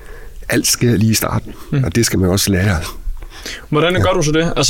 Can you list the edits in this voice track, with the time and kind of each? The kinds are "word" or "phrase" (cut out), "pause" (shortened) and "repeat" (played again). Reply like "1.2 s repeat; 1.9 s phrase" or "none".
none